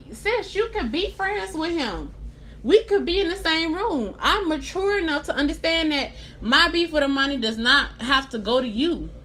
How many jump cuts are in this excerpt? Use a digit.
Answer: 0